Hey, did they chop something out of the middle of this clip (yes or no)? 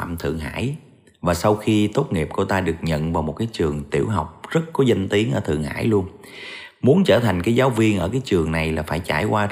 no